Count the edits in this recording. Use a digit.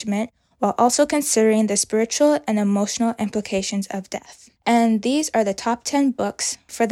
1